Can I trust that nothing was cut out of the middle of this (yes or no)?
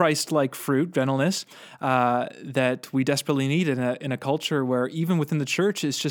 yes